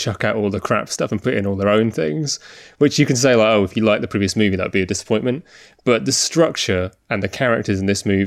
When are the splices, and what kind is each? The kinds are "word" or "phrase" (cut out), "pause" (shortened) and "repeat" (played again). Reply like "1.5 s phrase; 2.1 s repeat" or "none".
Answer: none